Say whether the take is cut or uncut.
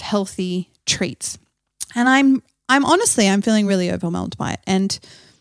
uncut